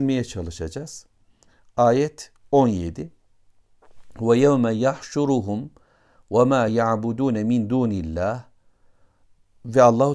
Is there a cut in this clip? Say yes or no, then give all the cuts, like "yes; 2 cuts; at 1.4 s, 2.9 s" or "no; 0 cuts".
no; 0 cuts